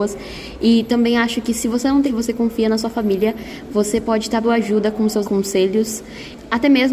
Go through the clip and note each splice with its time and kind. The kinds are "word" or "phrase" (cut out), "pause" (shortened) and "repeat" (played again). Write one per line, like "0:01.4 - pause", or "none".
0:02.0 - word
0:04.4 - word
0:05.2 - word